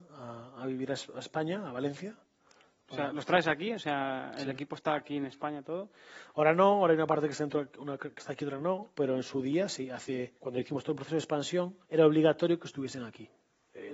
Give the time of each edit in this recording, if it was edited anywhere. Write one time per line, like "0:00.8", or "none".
0:08.9
0:10.4
0:11.8

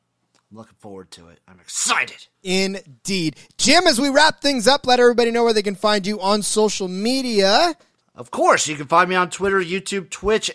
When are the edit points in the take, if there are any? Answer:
0:02.3
0:08.0

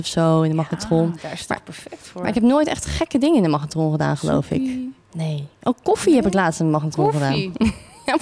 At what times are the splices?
0:05.0

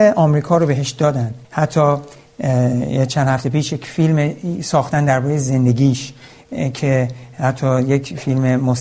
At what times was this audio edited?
0:01.4

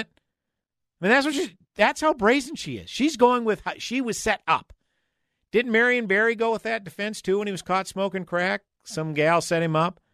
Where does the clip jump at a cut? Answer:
none

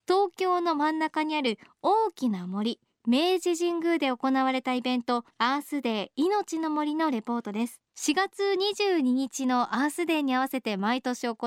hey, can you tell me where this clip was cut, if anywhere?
0:05.3
0:07.9

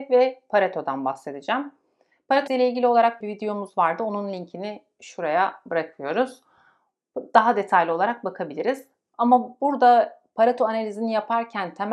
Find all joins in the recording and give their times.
0:02.5
0:03.2

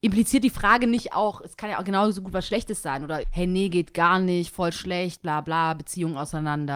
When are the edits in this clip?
0:03.2

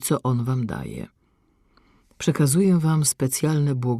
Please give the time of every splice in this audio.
0:03.0

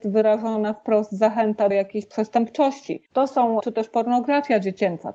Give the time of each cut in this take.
0:01.7
0:03.1
0:03.6

